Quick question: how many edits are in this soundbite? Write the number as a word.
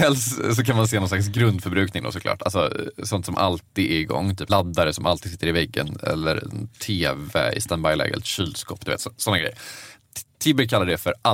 one